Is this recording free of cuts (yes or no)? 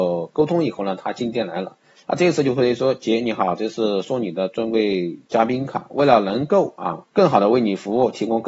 no